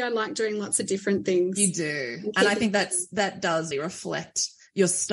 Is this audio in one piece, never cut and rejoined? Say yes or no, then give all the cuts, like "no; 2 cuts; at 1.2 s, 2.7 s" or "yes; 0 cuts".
no; 1 cut; at 3.7 s